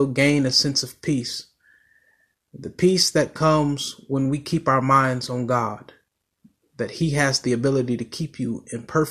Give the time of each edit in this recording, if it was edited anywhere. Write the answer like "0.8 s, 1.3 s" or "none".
none